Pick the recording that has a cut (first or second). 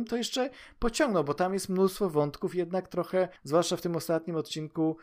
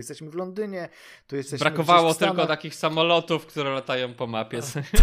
first